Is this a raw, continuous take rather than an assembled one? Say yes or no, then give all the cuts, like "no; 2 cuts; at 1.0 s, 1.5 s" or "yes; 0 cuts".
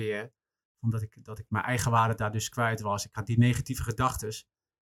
yes; 0 cuts